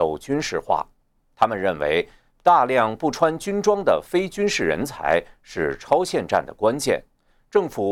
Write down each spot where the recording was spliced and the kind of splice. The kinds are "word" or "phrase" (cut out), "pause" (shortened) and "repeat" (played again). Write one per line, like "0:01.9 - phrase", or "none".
none